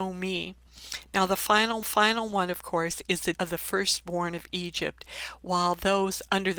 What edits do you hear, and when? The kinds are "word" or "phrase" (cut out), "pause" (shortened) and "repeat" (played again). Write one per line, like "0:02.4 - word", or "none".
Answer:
0:01.8 - repeat
0:03.3 - word